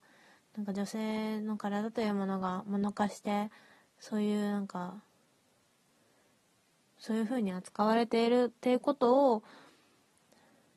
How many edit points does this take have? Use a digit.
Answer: 0